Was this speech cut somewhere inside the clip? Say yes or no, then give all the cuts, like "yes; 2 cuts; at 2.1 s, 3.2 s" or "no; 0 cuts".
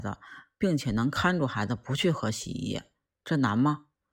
no; 0 cuts